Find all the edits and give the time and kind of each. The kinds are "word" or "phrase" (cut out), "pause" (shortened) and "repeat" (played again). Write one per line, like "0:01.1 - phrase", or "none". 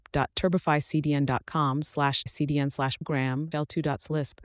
0:02.3 - word
0:03.0 - word
0:03.5 - word